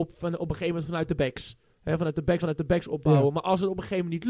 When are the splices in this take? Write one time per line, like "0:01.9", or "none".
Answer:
0:02.4